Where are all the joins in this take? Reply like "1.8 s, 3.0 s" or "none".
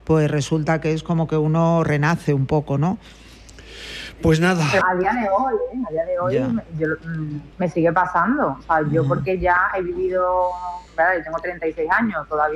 4.8 s, 7.5 s, 10.9 s